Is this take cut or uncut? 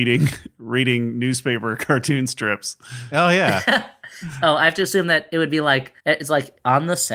cut